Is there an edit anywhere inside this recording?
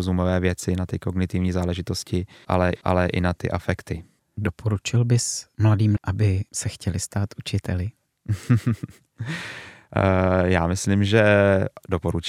yes; 2 cuts; at 2.8 s, 6.0 s

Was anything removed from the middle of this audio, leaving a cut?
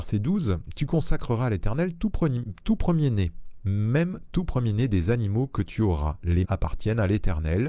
yes; 1 cut; at 6.4 s

